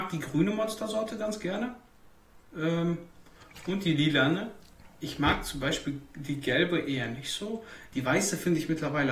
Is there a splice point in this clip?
no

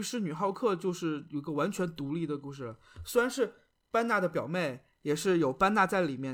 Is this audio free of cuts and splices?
yes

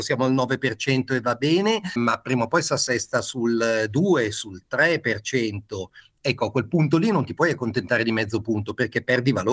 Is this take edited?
no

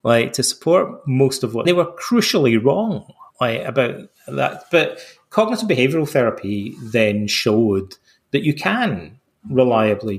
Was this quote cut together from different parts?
yes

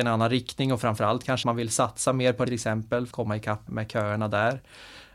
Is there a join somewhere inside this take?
yes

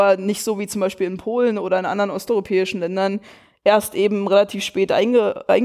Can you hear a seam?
no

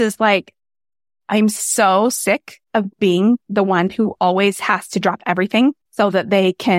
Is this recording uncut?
no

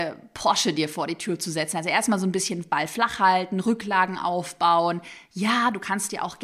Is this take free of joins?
yes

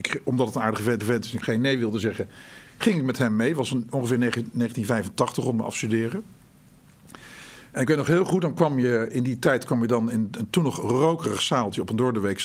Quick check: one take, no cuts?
no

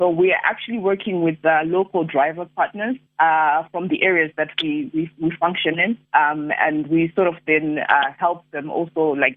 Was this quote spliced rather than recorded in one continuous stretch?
yes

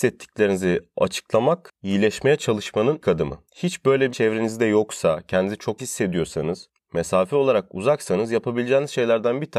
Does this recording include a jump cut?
yes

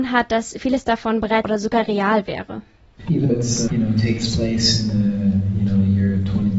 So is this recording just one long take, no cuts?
no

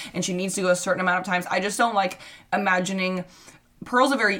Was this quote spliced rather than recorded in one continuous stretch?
no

